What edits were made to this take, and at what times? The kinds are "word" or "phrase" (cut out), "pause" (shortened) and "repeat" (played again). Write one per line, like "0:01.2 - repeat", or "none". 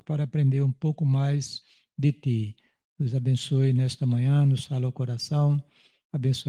none